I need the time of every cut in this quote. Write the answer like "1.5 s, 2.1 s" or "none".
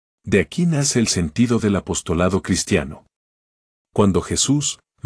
none